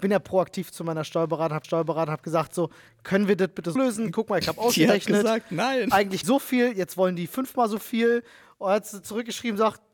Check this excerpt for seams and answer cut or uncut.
cut